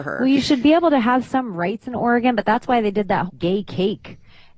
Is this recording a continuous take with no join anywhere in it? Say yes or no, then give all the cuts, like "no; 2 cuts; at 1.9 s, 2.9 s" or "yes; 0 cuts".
no; 1 cut; at 3.3 s